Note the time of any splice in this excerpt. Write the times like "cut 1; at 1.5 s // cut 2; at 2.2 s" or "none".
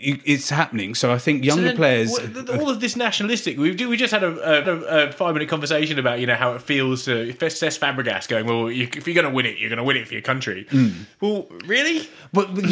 cut 1; at 4.6 s